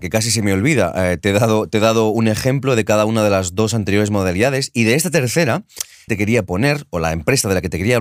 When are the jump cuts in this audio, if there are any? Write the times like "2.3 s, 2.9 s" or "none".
6.1 s